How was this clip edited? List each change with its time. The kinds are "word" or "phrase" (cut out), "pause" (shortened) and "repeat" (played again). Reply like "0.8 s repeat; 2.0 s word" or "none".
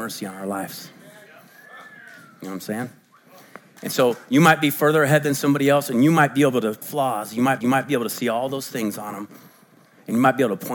6.8 s phrase; 7.6 s repeat